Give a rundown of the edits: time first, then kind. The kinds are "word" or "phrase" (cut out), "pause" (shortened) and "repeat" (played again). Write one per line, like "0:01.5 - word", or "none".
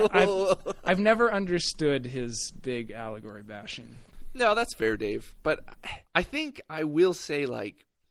0:06.1 - pause